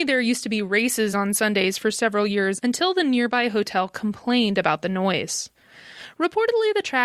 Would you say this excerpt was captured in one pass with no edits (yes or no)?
yes